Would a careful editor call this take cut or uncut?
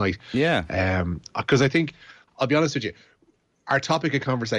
cut